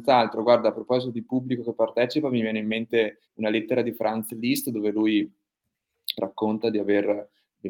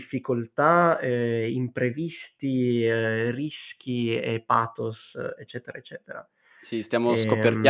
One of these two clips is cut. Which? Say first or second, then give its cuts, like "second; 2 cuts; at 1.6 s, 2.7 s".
first; 1 cut; at 3.2 s